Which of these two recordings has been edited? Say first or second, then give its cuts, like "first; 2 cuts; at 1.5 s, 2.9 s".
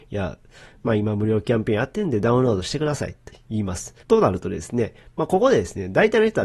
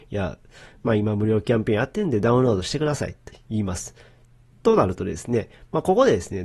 first; 1 cut; at 4.0 s